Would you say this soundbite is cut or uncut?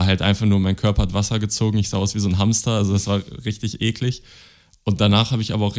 uncut